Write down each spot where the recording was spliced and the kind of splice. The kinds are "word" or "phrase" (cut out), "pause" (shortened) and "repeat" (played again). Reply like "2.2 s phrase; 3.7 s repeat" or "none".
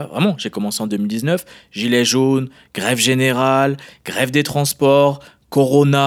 none